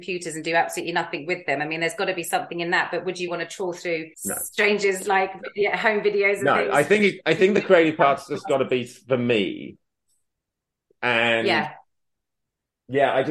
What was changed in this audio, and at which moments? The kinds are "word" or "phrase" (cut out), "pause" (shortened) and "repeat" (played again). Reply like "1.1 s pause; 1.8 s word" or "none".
3.3 s word; 4.1 s pause